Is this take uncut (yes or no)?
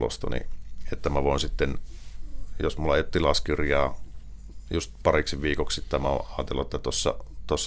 yes